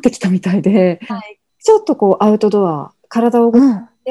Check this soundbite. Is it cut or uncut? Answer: cut